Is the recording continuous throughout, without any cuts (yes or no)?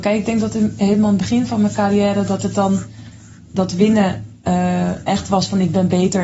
yes